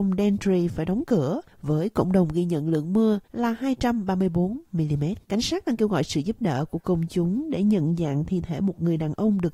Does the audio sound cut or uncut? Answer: cut